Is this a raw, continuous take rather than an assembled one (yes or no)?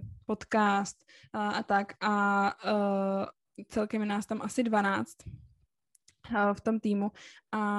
yes